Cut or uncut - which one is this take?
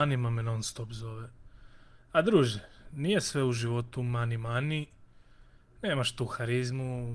uncut